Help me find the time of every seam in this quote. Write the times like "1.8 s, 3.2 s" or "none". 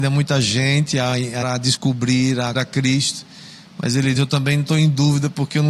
1.4 s, 2.5 s, 4.2 s